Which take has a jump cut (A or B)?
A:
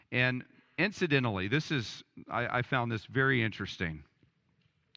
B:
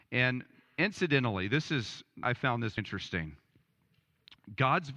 B